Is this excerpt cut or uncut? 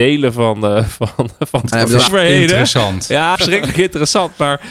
cut